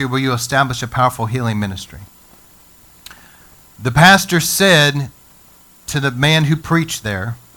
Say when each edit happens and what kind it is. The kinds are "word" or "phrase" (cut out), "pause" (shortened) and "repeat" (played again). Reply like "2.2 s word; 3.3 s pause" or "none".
none